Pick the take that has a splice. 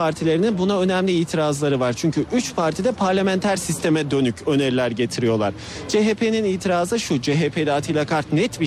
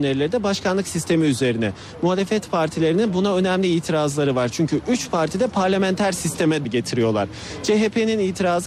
second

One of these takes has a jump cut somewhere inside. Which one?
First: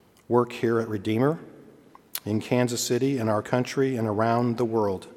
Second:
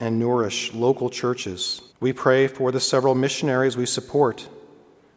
second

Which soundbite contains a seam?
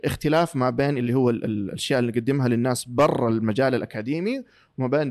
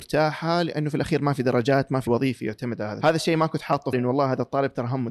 second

